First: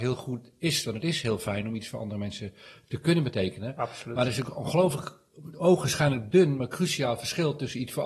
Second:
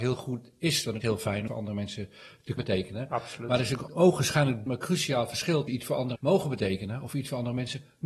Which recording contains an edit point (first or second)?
second